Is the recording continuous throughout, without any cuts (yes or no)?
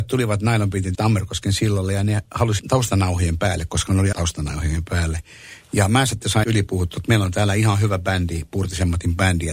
no